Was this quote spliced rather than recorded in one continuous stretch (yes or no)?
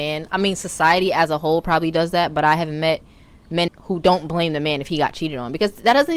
yes